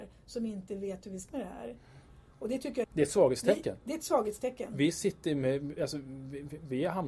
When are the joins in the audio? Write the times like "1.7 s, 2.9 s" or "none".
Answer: 1.3 s, 2.8 s